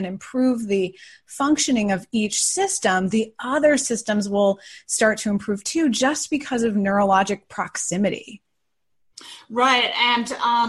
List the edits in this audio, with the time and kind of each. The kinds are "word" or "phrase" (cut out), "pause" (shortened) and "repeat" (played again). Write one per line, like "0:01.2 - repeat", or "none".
none